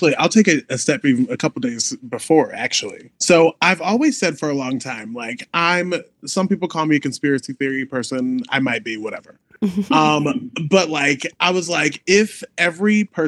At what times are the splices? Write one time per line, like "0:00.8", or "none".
0:03.2